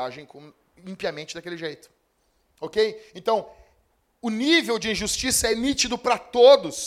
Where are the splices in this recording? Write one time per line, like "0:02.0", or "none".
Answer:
none